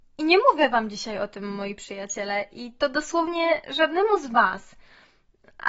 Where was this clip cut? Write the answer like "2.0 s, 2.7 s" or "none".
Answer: none